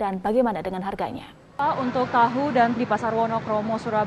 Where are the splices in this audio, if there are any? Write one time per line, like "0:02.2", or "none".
0:02.8